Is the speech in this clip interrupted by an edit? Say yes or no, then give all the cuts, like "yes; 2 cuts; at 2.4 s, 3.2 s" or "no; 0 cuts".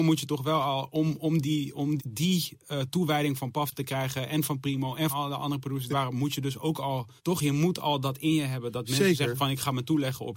yes; 4 cuts; at 2.0 s, 5.1 s, 5.9 s, 7.2 s